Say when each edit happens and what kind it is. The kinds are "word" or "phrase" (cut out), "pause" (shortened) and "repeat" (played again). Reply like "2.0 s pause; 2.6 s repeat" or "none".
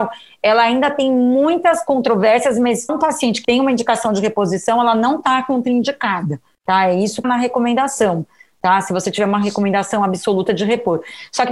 2.9 s word; 3.4 s word; 7.2 s word